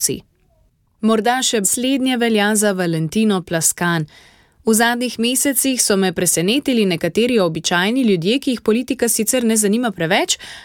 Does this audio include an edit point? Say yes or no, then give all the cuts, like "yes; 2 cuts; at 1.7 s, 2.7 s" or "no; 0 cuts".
yes; 1 cut; at 1.6 s